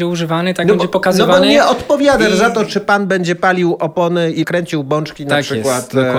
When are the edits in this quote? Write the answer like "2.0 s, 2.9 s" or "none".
none